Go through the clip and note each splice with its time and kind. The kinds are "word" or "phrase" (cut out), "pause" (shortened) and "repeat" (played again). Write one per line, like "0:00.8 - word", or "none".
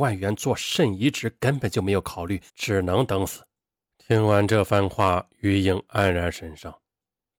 0:02.5 - pause
0:03.9 - pause